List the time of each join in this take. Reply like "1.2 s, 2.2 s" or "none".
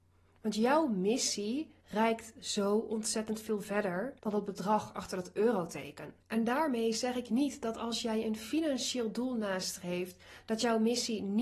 1.8 s, 4.2 s, 6.2 s